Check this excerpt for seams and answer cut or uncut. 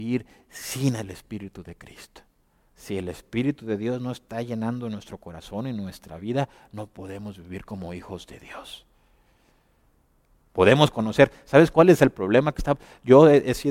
uncut